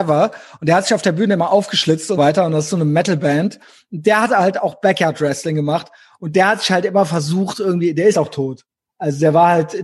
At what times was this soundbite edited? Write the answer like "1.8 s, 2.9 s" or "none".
2.2 s, 8.1 s